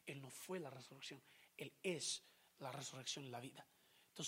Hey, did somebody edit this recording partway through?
no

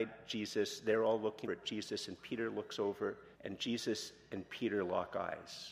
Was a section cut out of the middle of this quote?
yes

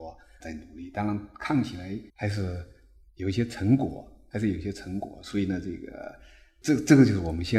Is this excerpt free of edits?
no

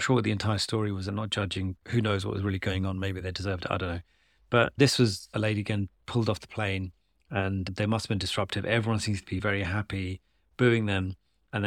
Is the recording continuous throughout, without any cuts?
yes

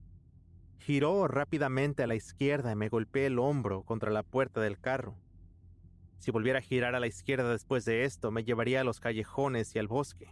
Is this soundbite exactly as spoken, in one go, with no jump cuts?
yes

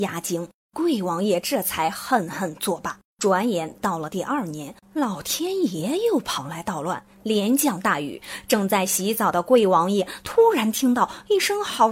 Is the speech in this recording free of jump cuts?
no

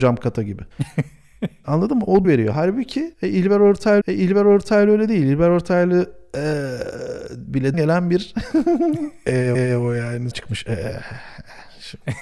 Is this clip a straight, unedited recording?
no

